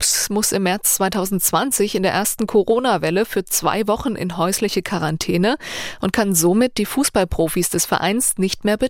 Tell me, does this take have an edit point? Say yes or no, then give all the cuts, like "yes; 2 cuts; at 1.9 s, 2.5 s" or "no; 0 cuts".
no; 0 cuts